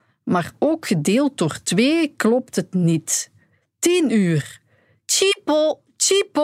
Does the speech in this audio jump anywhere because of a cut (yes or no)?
no